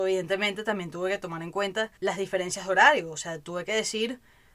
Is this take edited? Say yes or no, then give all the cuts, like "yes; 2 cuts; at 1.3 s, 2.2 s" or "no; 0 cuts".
yes; 1 cut; at 2.0 s